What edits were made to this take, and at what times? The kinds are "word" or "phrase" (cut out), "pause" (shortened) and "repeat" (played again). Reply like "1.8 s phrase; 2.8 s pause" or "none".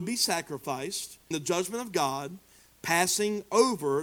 1.3 s word